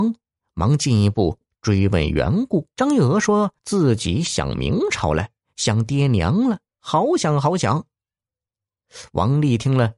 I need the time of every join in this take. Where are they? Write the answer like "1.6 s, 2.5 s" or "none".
2.7 s, 3.6 s